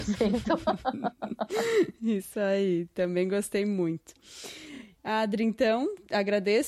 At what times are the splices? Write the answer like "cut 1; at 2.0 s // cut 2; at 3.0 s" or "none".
none